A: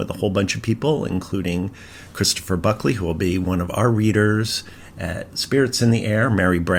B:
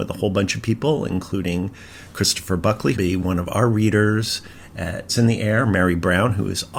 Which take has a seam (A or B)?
B